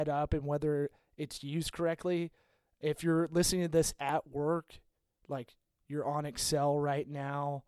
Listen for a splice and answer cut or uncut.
uncut